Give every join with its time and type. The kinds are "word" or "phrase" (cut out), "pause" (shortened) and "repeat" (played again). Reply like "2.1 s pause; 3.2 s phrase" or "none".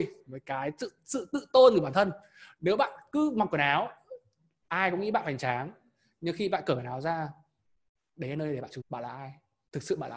8.8 s word